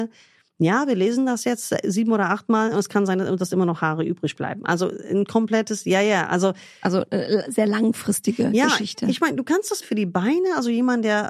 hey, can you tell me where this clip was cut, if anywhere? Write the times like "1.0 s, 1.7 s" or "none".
9.8 s

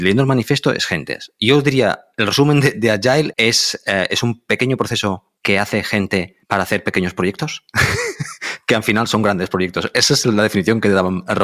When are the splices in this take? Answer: 3.3 s, 5.4 s, 6.4 s

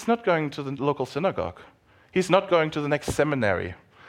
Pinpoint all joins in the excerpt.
none

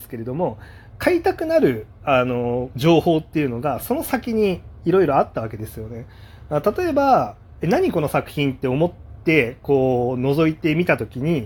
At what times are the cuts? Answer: 0.9 s

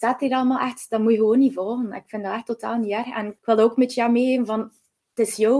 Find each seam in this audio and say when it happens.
3.4 s

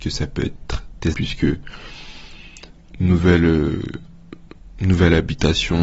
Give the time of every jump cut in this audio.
1.1 s, 2.9 s

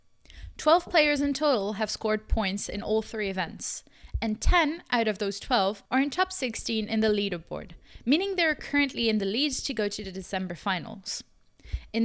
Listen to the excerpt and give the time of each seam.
5.9 s

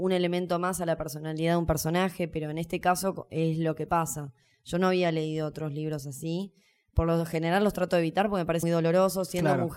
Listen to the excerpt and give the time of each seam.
8.6 s

